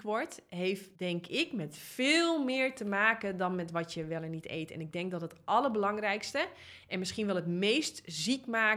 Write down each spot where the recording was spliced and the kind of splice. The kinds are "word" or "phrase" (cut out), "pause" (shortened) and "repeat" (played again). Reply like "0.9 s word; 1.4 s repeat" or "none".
0.9 s pause